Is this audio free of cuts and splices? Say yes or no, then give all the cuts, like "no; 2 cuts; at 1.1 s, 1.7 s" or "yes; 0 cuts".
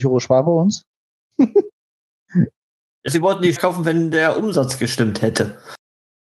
no; 3 cuts; at 1.7 s, 3.1 s, 3.6 s